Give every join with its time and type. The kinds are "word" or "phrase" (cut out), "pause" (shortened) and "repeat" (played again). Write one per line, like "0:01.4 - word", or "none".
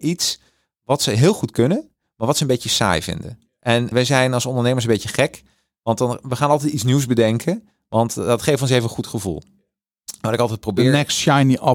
0:03.9 - word